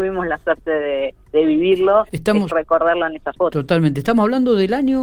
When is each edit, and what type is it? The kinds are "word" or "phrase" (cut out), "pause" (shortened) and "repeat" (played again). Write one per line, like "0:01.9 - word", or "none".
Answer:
0:01.2 - pause
0:02.5 - word